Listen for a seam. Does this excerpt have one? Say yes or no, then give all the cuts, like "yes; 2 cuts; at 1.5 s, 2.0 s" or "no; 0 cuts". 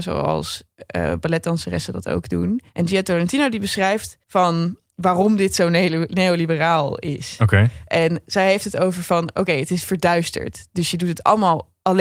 yes; 2 cuts; at 2.7 s, 4.2 s